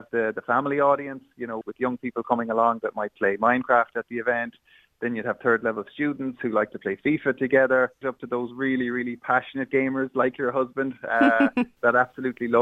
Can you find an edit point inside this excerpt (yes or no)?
yes